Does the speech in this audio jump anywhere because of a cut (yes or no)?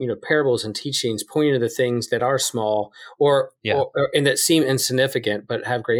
no